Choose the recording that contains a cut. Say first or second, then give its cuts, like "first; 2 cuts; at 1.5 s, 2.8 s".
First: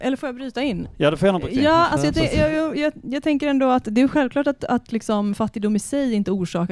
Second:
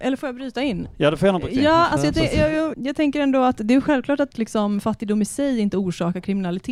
second; 2 cuts; at 2.7 s, 4.3 s